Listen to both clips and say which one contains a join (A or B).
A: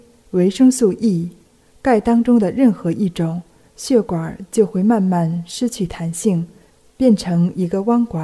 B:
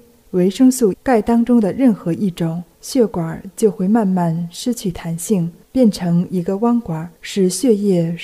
B